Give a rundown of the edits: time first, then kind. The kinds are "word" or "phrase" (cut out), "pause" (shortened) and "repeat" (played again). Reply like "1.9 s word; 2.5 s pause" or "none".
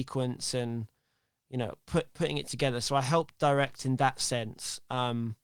none